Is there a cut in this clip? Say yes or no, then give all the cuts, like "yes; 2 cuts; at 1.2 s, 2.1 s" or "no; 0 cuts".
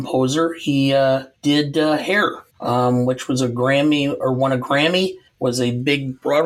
yes; 3 cuts; at 1.4 s, 2.5 s, 5.3 s